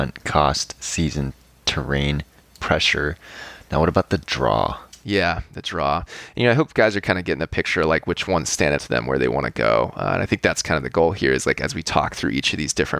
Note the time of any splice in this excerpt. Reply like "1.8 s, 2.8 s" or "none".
8.8 s